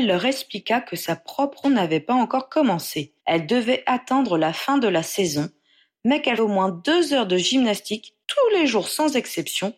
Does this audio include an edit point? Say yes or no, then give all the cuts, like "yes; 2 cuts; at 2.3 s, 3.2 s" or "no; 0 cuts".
yes; 4 cuts; at 1.6 s, 3.2 s, 6.4 s, 8.2 s